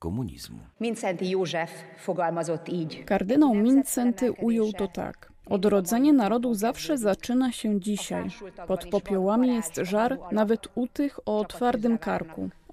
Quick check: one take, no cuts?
yes; 0 cuts

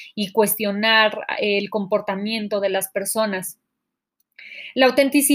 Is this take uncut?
yes; 0 cuts

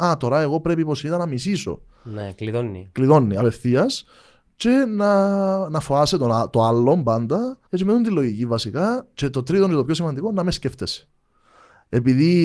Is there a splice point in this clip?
yes; 1 cut; at 7.7 s

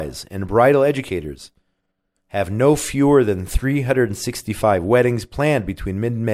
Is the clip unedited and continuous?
yes; 0 cuts

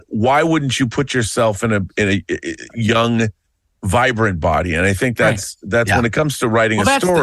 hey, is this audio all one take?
yes; 0 cuts

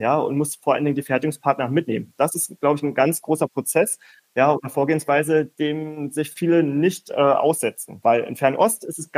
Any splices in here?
yes; 1 cut; at 5.5 s

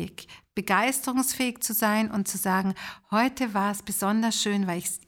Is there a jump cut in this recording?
no; 0 cuts

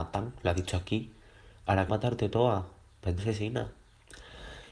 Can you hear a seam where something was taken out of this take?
yes; 2 cuts; at 1.9 s, 3.2 s

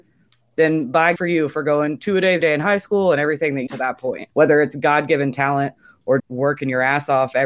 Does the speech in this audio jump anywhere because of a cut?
yes; 6 cuts; at 1.2 s, 2.0 s, 2.4 s, 3.7 s, 4.3 s, 6.2 s

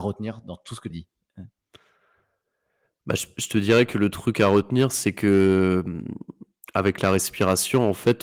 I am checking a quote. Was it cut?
yes; 1 cut; at 0.9 s

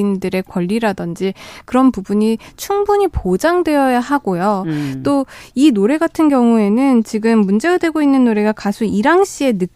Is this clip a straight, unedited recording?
yes; 0 cuts

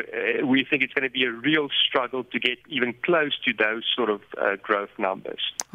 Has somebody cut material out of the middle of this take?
yes; 1 cut; at 2.6 s

